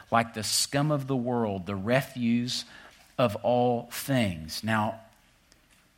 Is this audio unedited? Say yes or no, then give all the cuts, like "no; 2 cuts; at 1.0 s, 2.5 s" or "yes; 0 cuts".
yes; 0 cuts